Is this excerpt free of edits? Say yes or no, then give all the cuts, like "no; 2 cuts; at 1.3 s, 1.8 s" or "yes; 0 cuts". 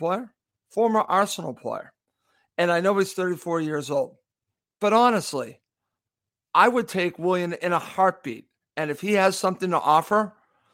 yes; 0 cuts